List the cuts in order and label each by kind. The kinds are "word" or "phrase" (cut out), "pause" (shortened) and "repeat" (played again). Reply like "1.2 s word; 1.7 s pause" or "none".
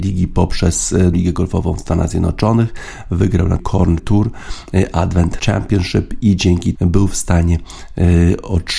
1.1 s word; 3.6 s word; 4.0 s word; 5.4 s word; 6.8 s word